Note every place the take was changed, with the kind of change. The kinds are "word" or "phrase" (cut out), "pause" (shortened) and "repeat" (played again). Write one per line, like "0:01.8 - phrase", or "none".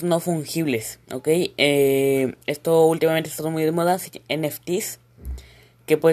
0:01.0 - pause
0:02.4 - pause
0:04.3 - word